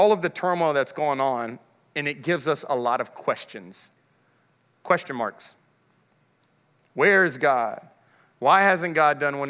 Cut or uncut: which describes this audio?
uncut